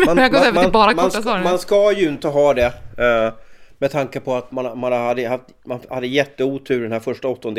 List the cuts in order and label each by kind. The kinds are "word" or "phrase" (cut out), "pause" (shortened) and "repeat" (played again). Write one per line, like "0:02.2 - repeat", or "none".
0:04.5 - phrase